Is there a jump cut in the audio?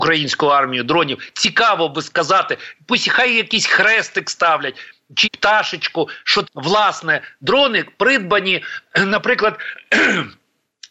yes; 2 cuts; at 5.2 s, 6.4 s

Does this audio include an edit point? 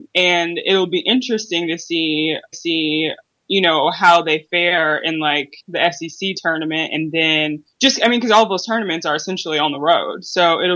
yes; 3 cuts; at 2.5 s, 5.6 s, 7.7 s

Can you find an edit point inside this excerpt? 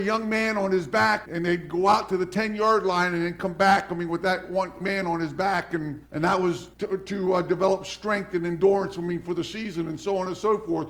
yes; 4 cuts; at 1.3 s, 4.8 s, 6.1 s, 6.7 s

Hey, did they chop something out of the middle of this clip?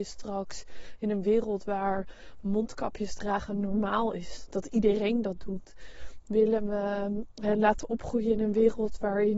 no; 0 cuts

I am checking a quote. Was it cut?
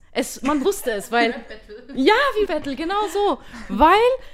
yes; 1 cut; at 2.5 s

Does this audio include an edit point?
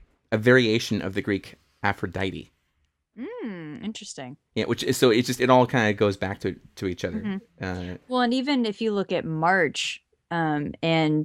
no; 0 cuts

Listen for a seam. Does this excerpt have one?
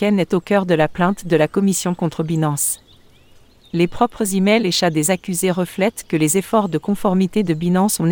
no; 0 cuts

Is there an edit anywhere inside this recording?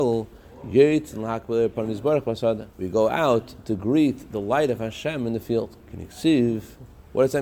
yes; 2 cuts; at 2.7 s, 5.8 s

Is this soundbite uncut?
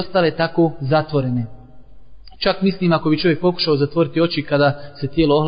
yes; 0 cuts

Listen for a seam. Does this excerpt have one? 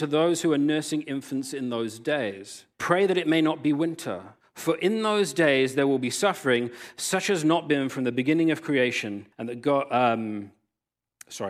yes; 3 cuts; at 2.7 s, 4.4 s, 9.3 s

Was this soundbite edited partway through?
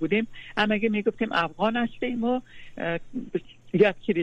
no; 0 cuts

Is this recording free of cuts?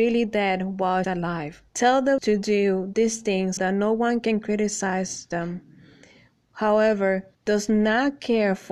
no; 5 cuts; at 1.0 s, 1.7 s, 2.2 s, 3.6 s, 7.3 s

